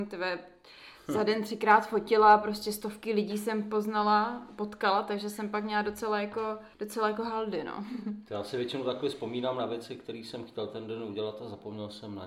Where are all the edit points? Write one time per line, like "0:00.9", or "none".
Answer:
0:06.7